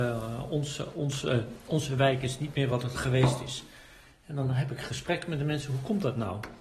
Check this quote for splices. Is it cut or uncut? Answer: uncut